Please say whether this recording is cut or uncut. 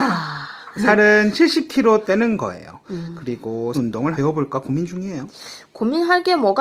cut